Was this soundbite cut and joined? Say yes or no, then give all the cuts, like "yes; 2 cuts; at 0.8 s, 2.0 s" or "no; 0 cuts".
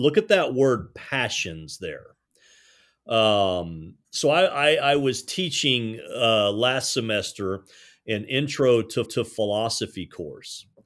yes; 2 cuts; at 4.0 s, 9.0 s